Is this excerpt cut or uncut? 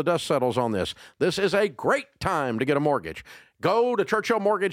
uncut